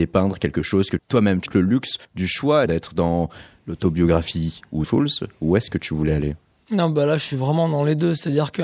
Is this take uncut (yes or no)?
no